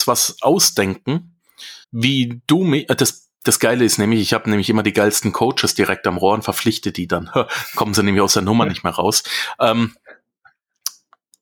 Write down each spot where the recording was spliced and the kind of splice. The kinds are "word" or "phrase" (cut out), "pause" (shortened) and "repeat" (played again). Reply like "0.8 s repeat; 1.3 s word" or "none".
1.8 s pause